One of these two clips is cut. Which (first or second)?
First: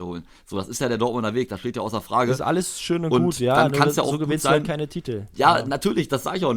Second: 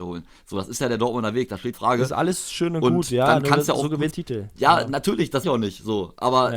second